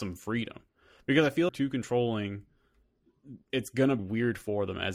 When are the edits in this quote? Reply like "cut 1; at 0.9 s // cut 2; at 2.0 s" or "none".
cut 1; at 1.5 s // cut 2; at 3.5 s // cut 3; at 4.0 s